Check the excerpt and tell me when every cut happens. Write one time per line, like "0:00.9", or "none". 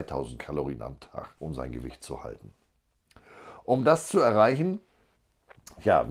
0:01.4